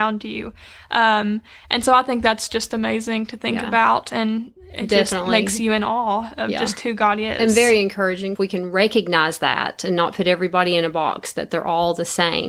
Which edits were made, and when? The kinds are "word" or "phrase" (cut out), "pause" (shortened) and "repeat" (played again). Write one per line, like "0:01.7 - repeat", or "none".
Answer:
none